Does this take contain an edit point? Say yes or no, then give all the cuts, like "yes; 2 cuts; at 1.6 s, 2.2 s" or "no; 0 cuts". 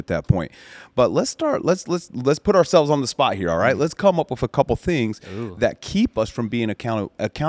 no; 0 cuts